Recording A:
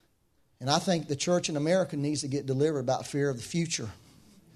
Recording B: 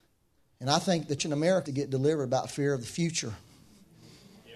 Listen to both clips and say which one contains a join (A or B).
B